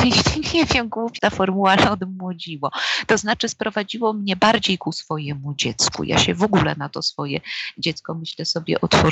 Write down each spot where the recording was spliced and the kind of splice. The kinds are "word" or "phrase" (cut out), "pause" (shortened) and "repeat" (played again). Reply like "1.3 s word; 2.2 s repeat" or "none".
1.2 s word